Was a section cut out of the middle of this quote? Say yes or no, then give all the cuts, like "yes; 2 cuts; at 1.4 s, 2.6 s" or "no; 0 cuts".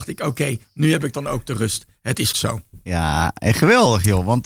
yes; 1 cut; at 2.3 s